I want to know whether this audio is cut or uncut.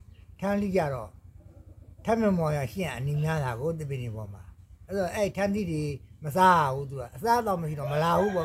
uncut